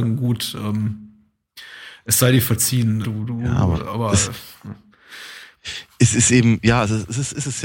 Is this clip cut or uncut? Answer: cut